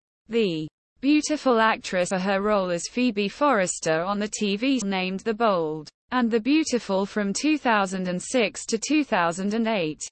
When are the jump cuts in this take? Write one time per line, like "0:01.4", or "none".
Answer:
0:02.1
0:04.8
0:06.0